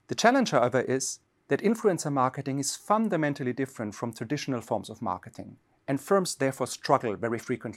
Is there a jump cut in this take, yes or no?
no